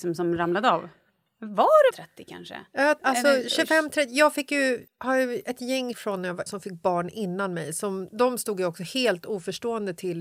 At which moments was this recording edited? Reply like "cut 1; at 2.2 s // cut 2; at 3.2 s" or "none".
cut 1; at 1.9 s // cut 2; at 3.0 s // cut 3; at 4.9 s // cut 4; at 5.9 s // cut 5; at 6.5 s